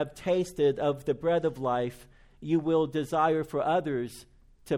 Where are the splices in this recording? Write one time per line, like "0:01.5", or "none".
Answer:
none